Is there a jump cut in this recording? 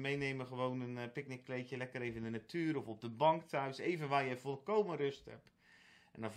no; 0 cuts

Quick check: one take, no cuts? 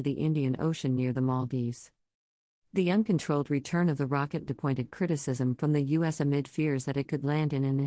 no; 1 cut; at 4.5 s

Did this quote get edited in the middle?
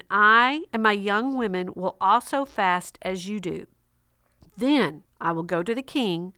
yes; 1 cut; at 5.1 s

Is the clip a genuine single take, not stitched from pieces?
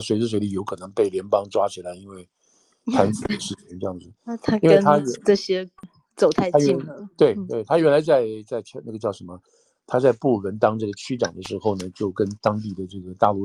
yes; 0 cuts

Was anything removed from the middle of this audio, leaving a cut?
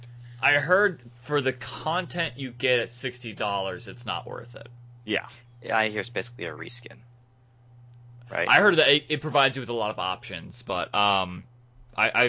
no; 0 cuts

